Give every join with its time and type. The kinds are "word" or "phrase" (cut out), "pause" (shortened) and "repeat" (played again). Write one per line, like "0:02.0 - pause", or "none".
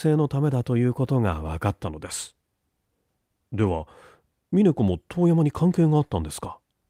none